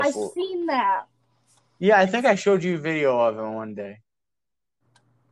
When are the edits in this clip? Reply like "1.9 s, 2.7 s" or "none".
none

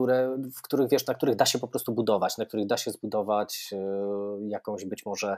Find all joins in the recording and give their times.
none

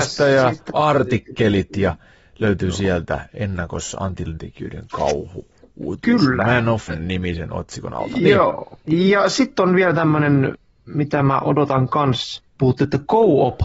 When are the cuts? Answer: 4.4 s, 6.9 s, 8.8 s, 12.5 s

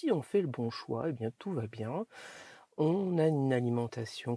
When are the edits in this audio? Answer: none

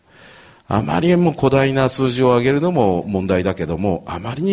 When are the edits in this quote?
none

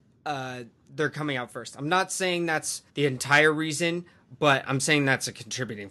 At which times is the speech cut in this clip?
2.9 s

